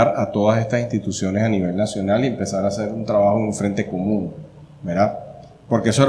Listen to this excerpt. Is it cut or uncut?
uncut